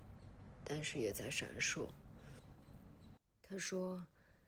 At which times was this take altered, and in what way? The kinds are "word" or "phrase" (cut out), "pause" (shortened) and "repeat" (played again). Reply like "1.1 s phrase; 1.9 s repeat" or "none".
3.2 s pause